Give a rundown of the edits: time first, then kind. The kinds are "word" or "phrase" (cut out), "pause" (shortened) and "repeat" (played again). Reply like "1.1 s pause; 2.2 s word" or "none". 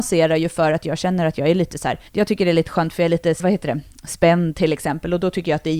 2.1 s pause; 3.4 s word